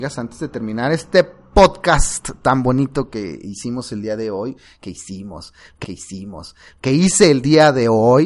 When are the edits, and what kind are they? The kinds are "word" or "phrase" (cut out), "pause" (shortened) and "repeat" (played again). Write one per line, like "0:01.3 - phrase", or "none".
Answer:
0:05.8 - repeat